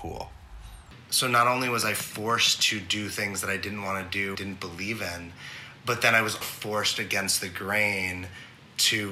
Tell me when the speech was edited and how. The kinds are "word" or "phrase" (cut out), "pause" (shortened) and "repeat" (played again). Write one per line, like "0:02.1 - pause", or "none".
0:04.3 - word
0:06.4 - word